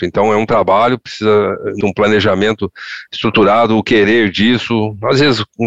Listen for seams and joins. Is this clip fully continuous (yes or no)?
no